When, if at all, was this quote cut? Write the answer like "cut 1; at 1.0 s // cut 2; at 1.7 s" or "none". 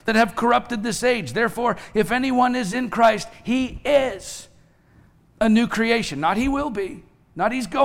none